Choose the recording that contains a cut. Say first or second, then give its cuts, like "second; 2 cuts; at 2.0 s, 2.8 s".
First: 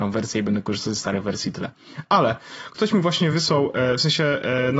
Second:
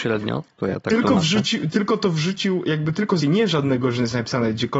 second; 2 cuts; at 1.7 s, 3.2 s